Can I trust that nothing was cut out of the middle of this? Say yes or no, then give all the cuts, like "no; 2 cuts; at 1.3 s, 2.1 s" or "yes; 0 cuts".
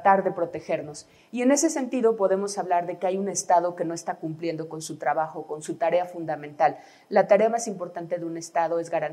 yes; 0 cuts